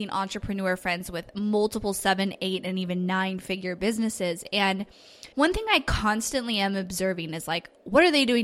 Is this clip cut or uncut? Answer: cut